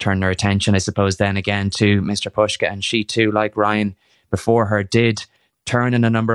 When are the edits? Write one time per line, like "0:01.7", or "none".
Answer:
none